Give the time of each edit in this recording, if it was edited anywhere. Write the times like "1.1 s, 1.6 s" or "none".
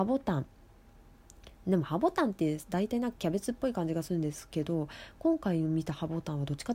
none